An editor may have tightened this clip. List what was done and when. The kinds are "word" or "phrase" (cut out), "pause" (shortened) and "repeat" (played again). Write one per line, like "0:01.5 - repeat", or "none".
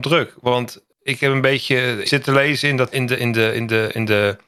0:02.1 - word
0:02.9 - word